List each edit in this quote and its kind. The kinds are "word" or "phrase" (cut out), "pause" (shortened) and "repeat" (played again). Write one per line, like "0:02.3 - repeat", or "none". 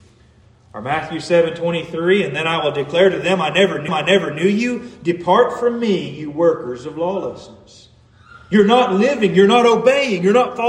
0:03.9 - repeat